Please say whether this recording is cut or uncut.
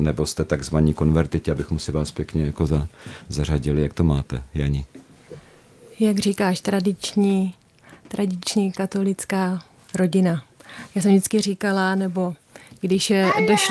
uncut